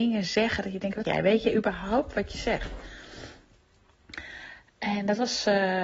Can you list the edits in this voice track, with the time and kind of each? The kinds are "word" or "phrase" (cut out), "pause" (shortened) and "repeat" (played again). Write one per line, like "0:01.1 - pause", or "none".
0:01.0 - word

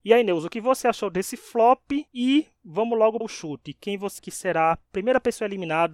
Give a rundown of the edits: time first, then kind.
0:02.1 - pause
0:03.2 - word
0:04.2 - word

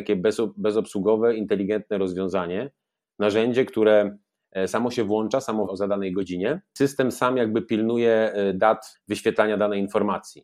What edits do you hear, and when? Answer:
0:05.7 - word

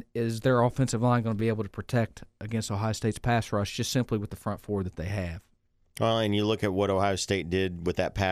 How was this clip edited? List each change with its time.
none

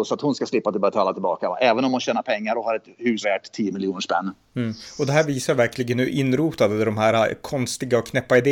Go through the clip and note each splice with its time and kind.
0:03.2 - phrase

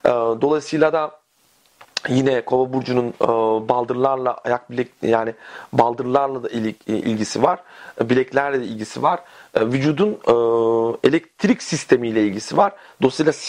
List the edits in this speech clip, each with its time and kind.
none

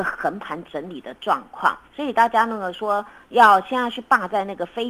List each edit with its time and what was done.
0:01.9 - pause

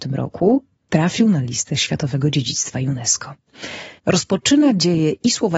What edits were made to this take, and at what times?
0:04.0 - pause

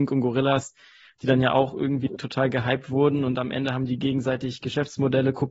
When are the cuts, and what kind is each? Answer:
none

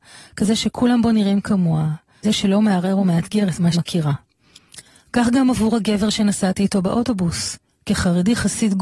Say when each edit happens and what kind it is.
0:02.2 - word
0:03.7 - word

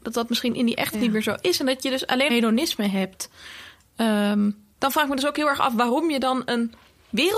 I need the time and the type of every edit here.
0:00.9 - phrase
0:02.3 - phrase
0:04.7 - pause

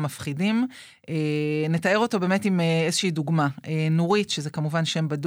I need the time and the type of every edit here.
none

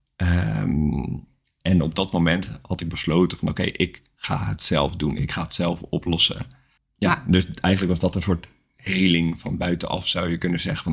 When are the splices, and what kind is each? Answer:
none

